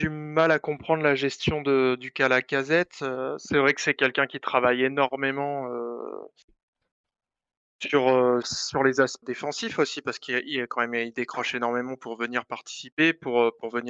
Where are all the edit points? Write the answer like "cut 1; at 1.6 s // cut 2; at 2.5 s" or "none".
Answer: cut 1; at 8.4 s // cut 2; at 9.2 s